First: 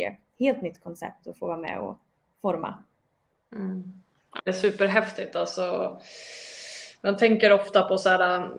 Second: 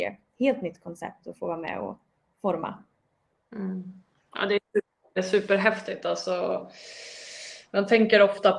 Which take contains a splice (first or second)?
first